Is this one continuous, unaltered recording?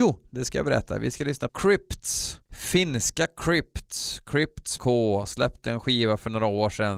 no; 3 cuts; at 1.5 s, 2.5 s, 4.8 s

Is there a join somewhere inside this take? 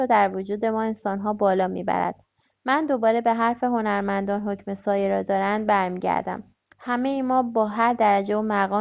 no; 0 cuts

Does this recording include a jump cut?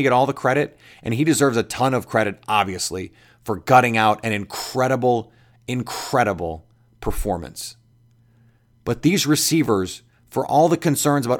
no; 0 cuts

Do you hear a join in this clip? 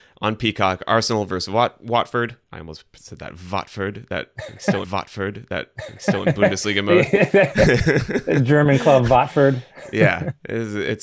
yes; 2 cuts; at 2.4 s, 4.8 s

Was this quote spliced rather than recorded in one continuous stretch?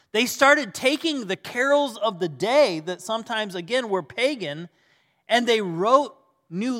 no; 0 cuts

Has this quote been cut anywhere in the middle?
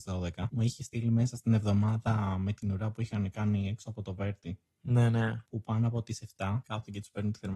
yes; 1 cut; at 4.8 s

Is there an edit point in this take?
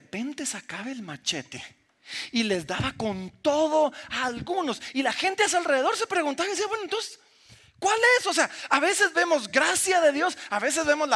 no; 0 cuts

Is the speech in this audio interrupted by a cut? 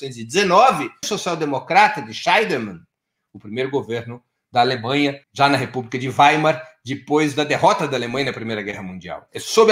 yes; 2 cuts; at 1.0 s, 5.2 s

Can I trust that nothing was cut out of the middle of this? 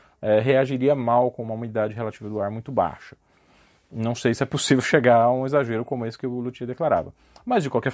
yes; 0 cuts

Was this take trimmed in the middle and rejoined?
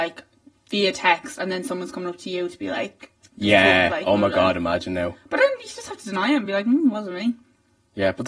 no; 0 cuts

